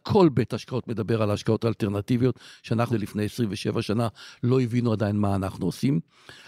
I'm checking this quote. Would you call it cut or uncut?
cut